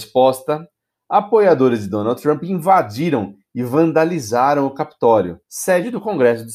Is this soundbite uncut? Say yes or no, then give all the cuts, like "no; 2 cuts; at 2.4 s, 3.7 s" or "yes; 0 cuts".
no; 1 cut; at 5.4 s